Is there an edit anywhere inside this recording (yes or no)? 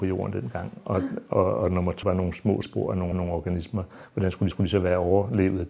yes